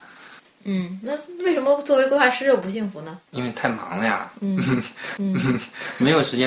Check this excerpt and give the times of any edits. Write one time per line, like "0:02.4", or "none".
0:03.3
0:05.2